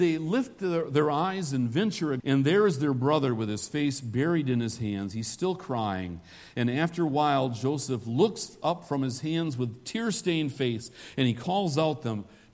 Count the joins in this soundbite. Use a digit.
1